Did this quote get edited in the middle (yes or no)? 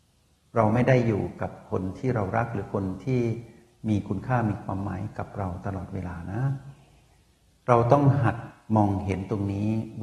no